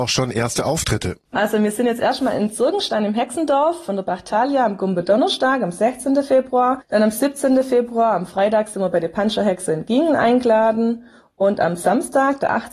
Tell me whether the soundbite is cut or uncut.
uncut